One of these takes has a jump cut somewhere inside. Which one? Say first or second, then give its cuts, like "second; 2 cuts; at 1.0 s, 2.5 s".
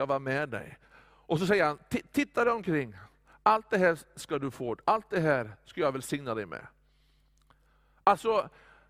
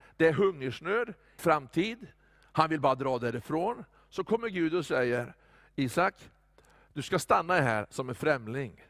second; 1 cut; at 1.4 s